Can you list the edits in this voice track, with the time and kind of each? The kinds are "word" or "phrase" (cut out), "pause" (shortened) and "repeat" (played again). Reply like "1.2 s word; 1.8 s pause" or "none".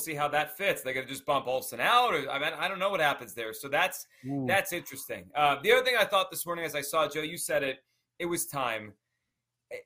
none